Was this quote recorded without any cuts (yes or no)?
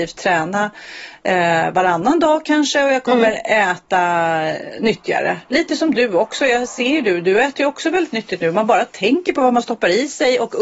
yes